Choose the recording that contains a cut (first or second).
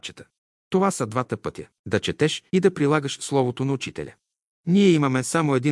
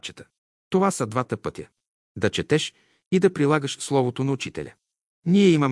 first